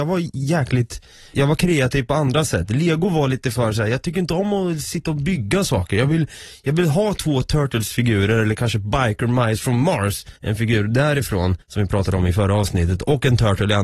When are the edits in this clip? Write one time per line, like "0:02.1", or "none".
0:01.3
0:10.4
0:11.6